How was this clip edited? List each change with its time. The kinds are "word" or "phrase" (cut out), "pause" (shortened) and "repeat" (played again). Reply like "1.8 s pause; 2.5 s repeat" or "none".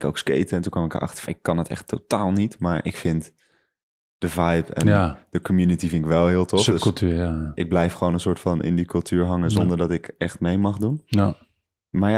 1.3 s word